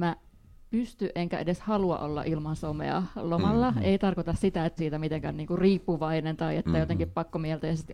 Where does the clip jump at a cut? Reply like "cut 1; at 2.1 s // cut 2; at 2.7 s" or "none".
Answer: cut 1; at 4.8 s